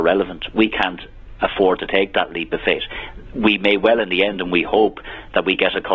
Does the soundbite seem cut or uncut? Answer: uncut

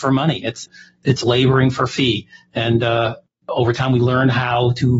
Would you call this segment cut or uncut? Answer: uncut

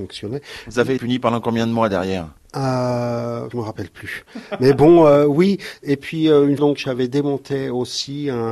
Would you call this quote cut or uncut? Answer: cut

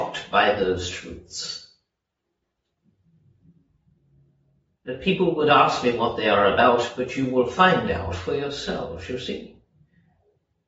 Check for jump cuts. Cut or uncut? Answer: uncut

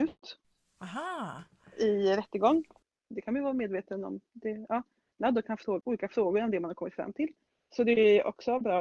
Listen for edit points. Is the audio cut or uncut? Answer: uncut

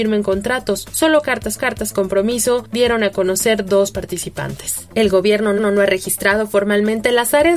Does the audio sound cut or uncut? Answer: cut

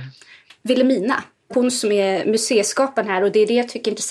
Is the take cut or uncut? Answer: cut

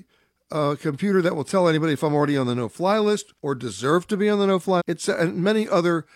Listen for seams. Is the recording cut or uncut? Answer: cut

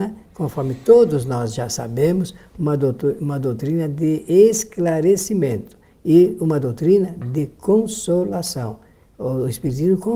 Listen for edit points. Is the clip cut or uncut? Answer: uncut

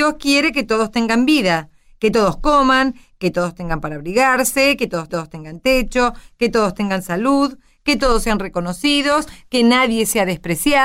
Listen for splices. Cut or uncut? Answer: cut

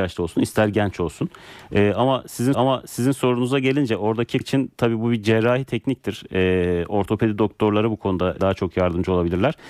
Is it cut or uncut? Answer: cut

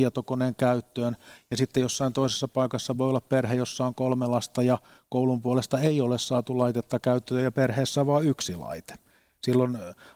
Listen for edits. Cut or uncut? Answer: uncut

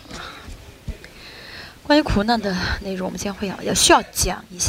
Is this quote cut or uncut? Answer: uncut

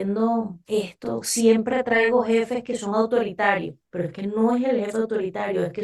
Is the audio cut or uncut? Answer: cut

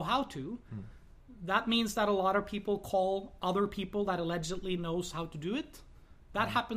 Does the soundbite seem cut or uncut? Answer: uncut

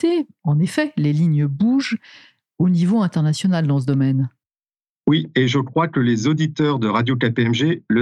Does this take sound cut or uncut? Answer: uncut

